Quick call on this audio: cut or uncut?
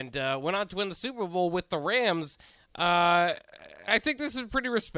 cut